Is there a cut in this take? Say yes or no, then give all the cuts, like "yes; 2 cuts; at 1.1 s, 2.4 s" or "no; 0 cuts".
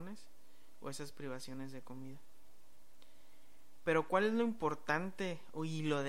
no; 0 cuts